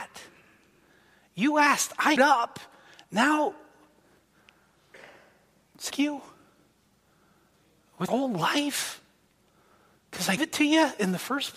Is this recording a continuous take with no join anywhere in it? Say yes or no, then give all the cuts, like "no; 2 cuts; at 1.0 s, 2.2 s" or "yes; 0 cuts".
no; 4 cuts; at 2.2 s, 5.9 s, 8.1 s, 10.4 s